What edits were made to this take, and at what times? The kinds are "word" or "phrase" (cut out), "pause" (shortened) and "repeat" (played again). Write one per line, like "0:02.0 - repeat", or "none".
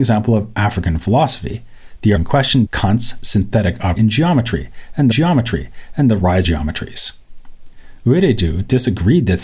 0:02.2 - word
0:02.7 - word
0:04.0 - word
0:05.1 - repeat
0:06.4 - phrase